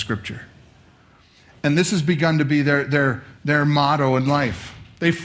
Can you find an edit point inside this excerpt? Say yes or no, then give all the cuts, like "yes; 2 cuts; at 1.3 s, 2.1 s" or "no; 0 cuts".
no; 0 cuts